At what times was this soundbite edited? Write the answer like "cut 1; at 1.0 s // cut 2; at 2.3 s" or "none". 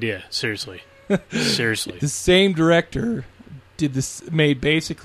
none